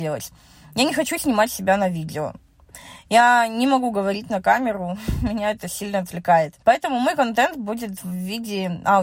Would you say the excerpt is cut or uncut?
cut